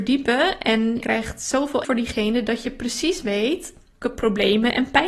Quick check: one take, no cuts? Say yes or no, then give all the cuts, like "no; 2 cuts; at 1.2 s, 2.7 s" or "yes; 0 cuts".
no; 3 cuts; at 1.0 s, 1.8 s, 4.0 s